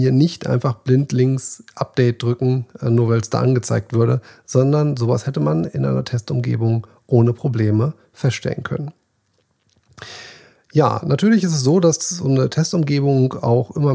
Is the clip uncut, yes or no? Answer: yes